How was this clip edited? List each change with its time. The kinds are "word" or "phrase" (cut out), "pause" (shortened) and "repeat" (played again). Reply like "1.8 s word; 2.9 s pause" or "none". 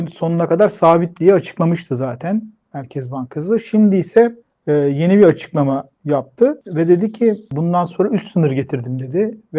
4.4 s pause; 5.9 s pause